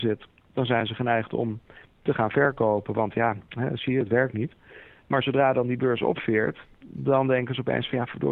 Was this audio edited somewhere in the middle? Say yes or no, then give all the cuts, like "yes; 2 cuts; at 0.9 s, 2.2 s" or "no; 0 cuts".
no; 0 cuts